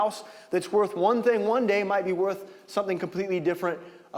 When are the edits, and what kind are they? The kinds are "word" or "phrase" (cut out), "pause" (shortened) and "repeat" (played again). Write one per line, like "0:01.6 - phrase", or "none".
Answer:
none